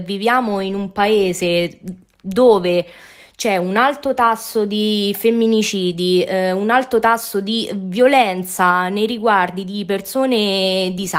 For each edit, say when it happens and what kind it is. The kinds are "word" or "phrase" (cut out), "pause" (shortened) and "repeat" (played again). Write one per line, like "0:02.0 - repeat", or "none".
none